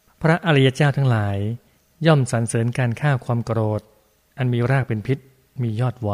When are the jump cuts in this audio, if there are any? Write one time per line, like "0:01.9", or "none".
none